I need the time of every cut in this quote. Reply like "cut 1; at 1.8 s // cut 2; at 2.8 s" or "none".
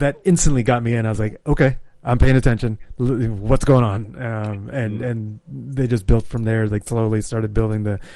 none